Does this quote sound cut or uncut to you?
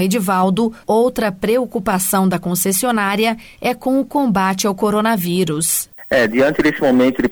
uncut